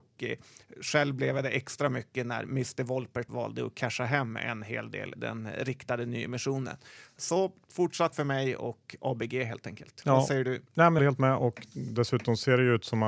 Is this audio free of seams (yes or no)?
no